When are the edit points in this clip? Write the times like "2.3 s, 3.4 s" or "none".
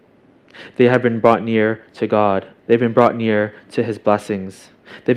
2.6 s